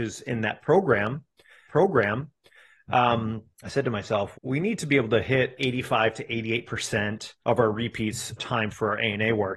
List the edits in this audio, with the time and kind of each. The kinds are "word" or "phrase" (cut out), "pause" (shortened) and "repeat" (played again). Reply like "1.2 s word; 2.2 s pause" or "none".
1.7 s repeat; 3.5 s pause; 4.3 s word; 5.6 s word; 7.4 s pause; 8.4 s word